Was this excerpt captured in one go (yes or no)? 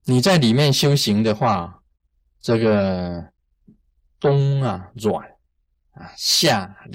yes